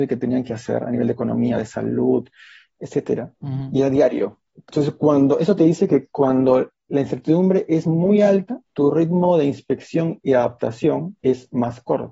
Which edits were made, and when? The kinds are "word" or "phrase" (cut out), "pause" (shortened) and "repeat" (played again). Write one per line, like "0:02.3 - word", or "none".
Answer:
0:03.4 - pause
0:04.5 - pause
0:08.6 - pause
0:11.2 - pause